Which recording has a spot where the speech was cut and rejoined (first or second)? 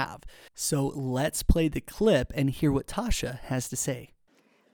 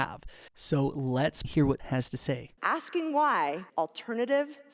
second